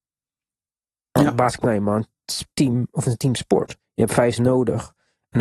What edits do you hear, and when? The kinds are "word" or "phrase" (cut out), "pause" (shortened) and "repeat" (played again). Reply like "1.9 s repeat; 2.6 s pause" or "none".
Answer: 1.6 s word; 2.5 s pause; 3.0 s word; 3.8 s pause; 4.4 s word